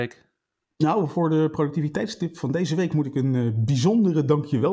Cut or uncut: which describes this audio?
uncut